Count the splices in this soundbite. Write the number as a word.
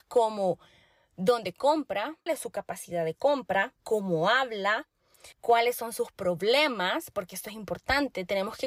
three